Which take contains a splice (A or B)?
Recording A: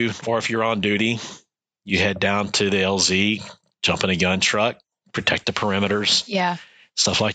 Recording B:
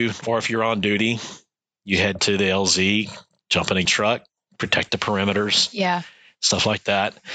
B